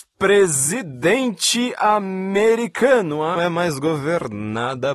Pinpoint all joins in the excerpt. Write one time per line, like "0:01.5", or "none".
0:03.4